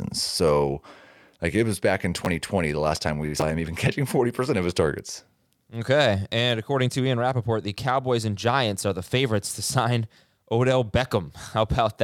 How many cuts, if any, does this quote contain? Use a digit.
0